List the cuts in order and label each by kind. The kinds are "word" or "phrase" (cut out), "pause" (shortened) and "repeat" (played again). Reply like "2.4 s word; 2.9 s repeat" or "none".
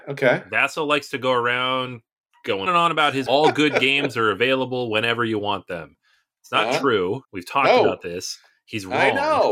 2.7 s word; 3.3 s phrase; 7.2 s pause

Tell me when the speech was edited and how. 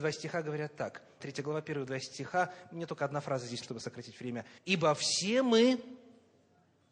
1.2 s word; 3.6 s word; 4.6 s pause

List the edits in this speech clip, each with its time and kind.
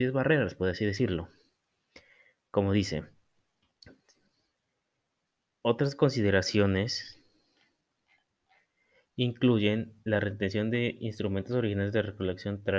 none

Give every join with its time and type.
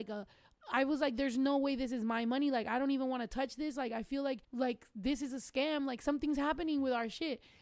4.4 s pause

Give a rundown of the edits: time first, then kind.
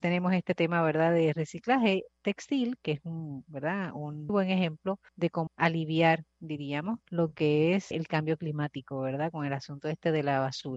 4.3 s word; 5.1 s pause; 5.5 s phrase; 7.0 s pause; 7.9 s word

